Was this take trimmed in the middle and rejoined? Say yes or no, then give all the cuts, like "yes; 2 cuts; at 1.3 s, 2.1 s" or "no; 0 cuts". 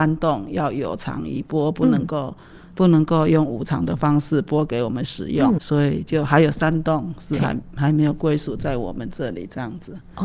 yes; 1 cut; at 5.6 s